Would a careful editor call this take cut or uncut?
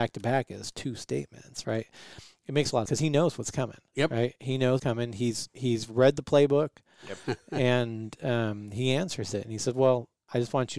cut